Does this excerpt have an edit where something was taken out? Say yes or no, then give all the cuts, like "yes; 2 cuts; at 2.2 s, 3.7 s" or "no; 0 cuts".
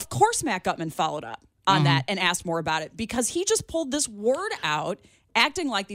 no; 0 cuts